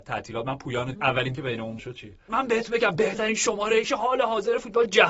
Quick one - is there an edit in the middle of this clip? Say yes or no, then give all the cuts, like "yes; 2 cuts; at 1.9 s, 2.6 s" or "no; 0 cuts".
yes; 5 cuts; at 0.9 s, 1.3 s, 1.8 s, 2.3 s, 3.8 s